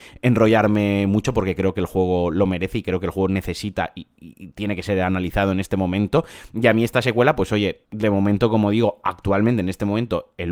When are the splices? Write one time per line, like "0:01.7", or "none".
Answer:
0:07.9